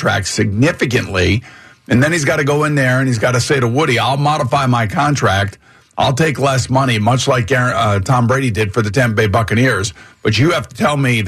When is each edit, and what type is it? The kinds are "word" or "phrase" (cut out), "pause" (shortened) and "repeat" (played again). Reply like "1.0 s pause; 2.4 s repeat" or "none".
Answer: none